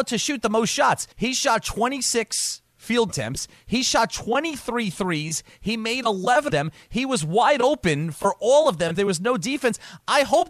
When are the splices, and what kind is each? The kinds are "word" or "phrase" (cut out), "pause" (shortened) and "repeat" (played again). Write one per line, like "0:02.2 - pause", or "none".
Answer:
0:01.1 - pause
0:03.1 - word
0:06.5 - word
0:08.9 - word